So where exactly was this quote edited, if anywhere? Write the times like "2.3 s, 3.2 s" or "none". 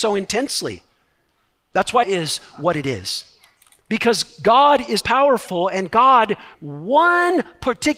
2.0 s, 5.0 s, 6.5 s